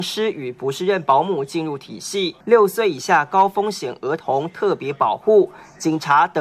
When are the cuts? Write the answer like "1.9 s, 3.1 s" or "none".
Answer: 2.4 s